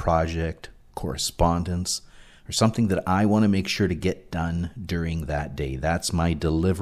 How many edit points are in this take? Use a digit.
0